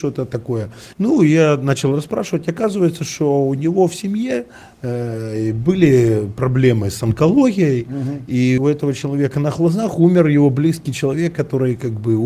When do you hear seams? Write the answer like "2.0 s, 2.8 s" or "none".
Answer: 0.9 s, 8.6 s